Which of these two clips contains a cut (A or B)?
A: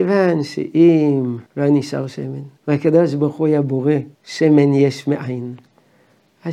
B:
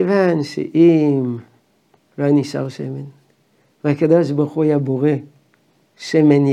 A